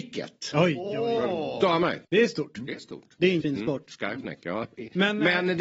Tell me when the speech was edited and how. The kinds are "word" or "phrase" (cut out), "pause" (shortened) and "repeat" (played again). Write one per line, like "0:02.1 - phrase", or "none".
0:02.0 - pause
0:03.4 - word